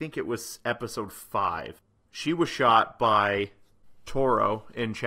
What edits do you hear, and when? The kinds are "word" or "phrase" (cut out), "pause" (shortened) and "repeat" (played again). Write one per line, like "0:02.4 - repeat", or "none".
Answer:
none